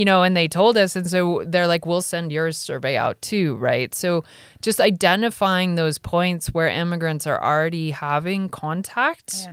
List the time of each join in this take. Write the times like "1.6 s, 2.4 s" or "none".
none